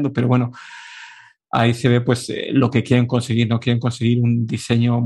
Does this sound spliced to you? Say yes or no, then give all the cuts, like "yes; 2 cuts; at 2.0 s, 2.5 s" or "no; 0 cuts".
no; 0 cuts